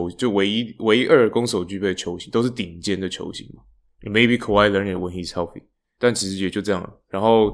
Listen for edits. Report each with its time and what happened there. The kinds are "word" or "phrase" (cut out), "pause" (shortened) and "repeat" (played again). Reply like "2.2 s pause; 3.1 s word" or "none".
none

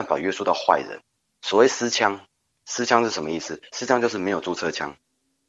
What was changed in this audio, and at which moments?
1.2 s pause; 2.5 s pause

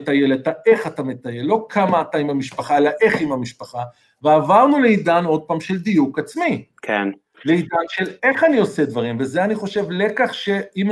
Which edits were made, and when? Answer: none

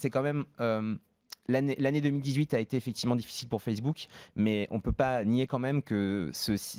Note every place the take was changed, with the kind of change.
none

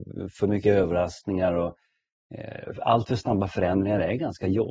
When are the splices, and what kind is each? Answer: none

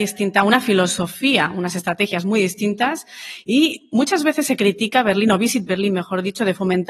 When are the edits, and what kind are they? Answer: none

